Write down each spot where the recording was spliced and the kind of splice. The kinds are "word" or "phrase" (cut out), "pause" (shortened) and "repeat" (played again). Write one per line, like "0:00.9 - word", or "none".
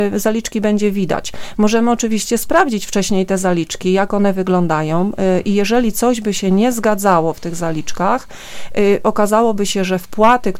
none